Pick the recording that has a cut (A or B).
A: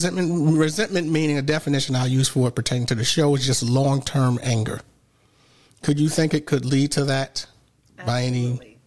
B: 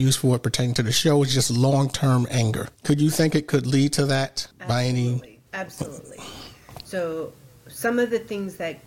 B